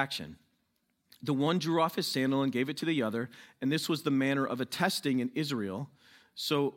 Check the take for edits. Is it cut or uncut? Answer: uncut